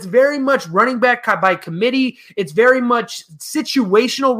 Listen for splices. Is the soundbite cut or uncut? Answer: uncut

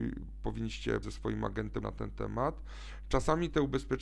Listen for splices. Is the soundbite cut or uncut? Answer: cut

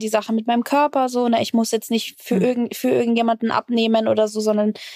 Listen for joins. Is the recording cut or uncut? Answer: uncut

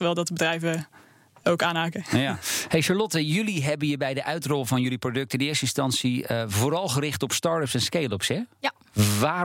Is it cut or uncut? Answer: uncut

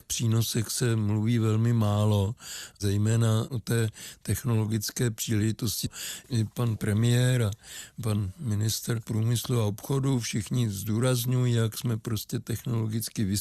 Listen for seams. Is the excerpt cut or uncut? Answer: uncut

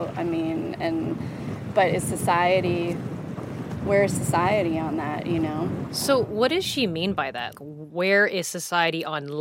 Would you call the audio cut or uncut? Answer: cut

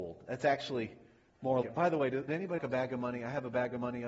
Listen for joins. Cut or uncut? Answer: cut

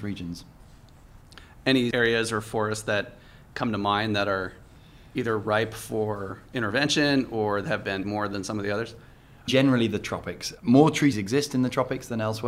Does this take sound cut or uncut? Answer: cut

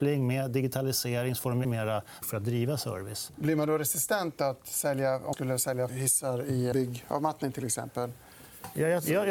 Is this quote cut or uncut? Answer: cut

